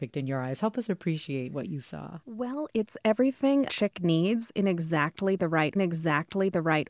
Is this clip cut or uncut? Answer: cut